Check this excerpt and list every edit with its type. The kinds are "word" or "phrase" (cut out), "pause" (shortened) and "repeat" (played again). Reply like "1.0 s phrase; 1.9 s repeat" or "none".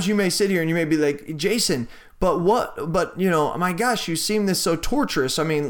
none